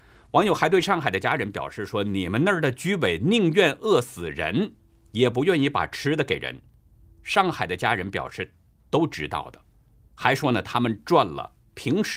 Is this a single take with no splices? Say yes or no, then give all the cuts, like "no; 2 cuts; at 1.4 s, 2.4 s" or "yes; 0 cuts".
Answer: yes; 0 cuts